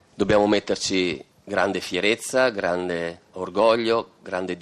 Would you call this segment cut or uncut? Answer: cut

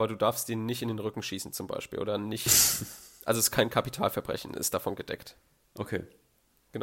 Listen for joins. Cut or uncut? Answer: uncut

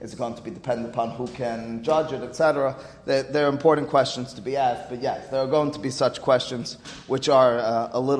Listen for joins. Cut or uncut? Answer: uncut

